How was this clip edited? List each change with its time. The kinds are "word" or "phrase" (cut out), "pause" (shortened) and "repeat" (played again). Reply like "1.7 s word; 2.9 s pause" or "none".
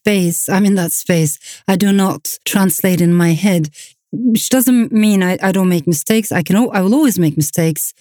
2.4 s pause